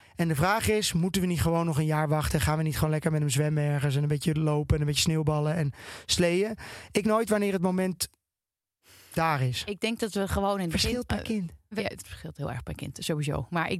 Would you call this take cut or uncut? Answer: cut